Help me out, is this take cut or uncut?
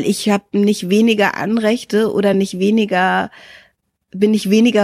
uncut